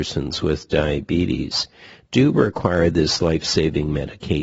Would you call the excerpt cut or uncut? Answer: uncut